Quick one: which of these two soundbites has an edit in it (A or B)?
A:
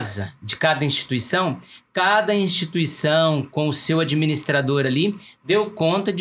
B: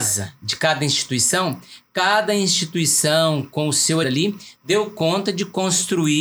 B